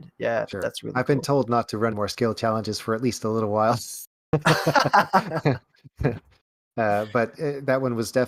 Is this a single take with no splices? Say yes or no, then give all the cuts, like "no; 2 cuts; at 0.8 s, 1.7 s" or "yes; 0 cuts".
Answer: no; 1 cut; at 1.9 s